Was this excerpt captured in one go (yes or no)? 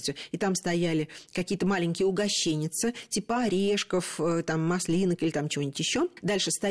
no